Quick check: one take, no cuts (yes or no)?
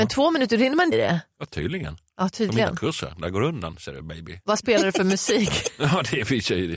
no